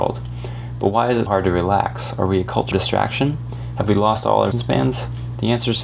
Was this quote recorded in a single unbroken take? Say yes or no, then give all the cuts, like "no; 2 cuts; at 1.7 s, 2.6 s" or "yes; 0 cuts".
no; 3 cuts; at 1.3 s, 2.7 s, 4.5 s